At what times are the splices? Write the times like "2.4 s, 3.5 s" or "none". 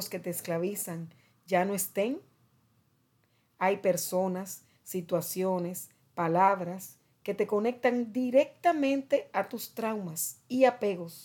none